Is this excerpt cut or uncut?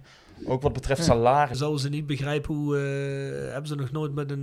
uncut